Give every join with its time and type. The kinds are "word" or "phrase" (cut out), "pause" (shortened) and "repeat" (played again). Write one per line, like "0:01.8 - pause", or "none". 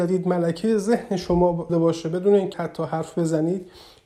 0:01.7 - word
0:02.5 - phrase